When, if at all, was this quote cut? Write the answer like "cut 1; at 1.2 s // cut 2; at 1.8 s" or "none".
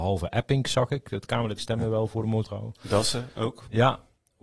cut 1; at 1.6 s // cut 2; at 2.4 s